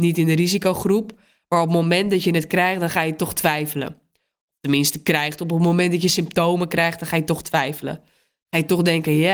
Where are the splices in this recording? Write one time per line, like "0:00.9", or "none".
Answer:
none